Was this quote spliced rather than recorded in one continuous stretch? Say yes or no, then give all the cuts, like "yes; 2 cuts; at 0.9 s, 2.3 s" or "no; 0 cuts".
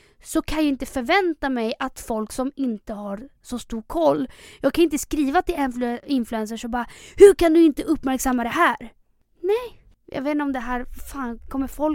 no; 0 cuts